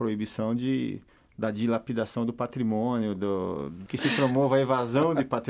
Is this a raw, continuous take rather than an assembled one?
no; 1 cut; at 1.1 s

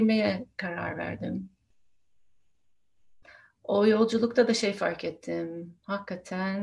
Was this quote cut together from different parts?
no; 0 cuts

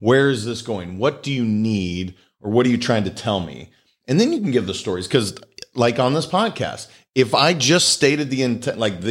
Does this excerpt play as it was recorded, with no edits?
yes; 0 cuts

